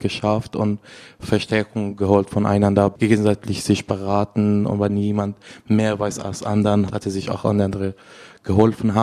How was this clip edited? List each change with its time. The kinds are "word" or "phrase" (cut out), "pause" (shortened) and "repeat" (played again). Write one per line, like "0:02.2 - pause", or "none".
0:06.9 - word